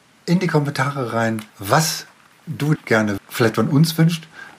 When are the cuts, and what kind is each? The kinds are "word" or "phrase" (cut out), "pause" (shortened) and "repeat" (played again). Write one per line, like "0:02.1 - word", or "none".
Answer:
0:01.5 - pause
0:02.7 - word
0:03.2 - word

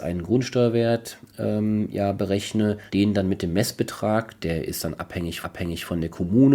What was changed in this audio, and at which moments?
0:01.3 - pause
0:02.9 - pause
0:05.4 - repeat

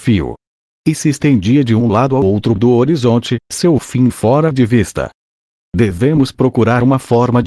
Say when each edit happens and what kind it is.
none

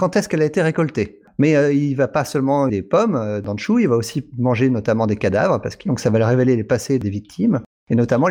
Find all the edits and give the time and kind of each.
0:02.7 - word
0:05.9 - phrase

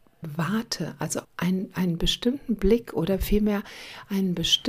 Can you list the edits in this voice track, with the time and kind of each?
0:01.2 - pause

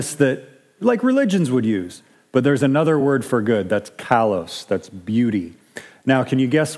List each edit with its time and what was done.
none

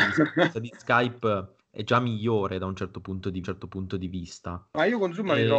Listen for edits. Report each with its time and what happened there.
0:01.6 - pause
0:03.4 - repeat

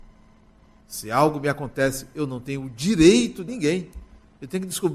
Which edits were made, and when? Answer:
0:03.5 - word

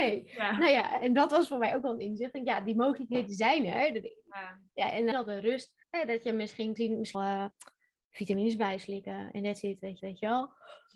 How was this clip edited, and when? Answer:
0:04.7 - pause
0:05.1 - word
0:05.8 - pause
0:06.8 - word
0:07.1 - phrase
0:10.0 - repeat

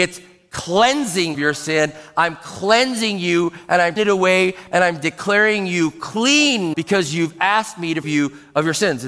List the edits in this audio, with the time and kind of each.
0:01.3 - word
0:04.0 - word
0:06.7 - word
0:08.0 - word

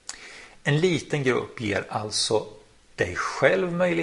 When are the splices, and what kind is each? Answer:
none

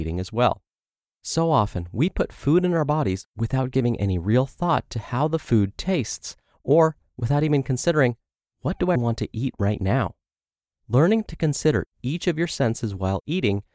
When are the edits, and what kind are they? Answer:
0:09.0 - word

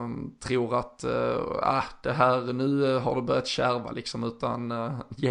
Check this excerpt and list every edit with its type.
none

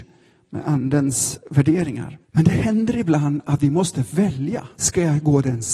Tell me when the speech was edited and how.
0:02.2 - pause
0:04.7 - pause

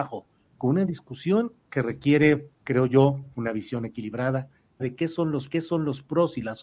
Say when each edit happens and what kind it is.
0:02.5 - pause
0:03.3 - pause
0:04.8 - word
0:05.5 - repeat

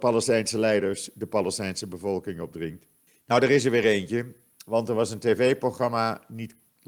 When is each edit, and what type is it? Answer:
0:03.1 - pause

